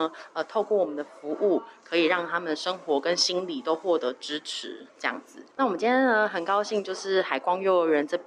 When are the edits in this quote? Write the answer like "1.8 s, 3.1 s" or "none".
5.5 s